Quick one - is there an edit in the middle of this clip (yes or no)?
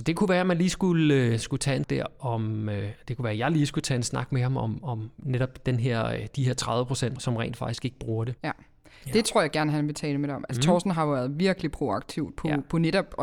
yes